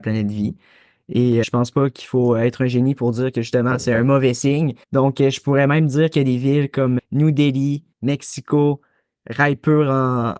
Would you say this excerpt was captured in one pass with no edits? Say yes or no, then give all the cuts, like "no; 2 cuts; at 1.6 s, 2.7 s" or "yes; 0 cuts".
no; 4 cuts; at 1.4 s, 4.8 s, 7.0 s, 7.9 s